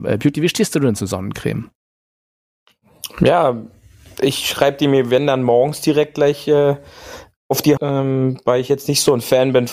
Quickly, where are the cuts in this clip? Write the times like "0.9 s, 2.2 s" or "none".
7.8 s